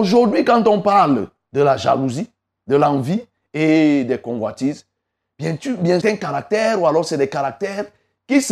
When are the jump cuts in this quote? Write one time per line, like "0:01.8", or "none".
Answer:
0:06.0